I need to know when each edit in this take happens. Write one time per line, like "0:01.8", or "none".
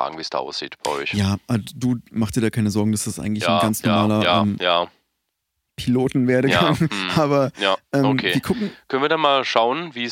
none